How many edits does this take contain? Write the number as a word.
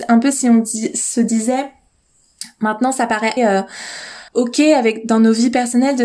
two